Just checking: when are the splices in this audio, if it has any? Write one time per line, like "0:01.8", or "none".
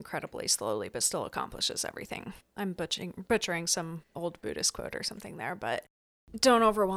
0:02.5